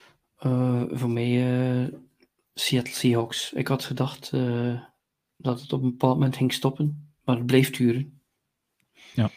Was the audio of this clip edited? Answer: no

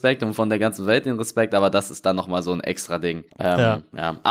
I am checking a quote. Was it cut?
yes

